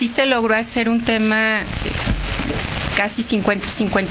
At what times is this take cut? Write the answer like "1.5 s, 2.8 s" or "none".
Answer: 1.8 s